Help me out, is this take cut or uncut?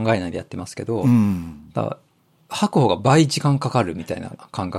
uncut